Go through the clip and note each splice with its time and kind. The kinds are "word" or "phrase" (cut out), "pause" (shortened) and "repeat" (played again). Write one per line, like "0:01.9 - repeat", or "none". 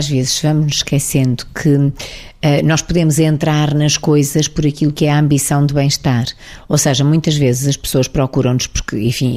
none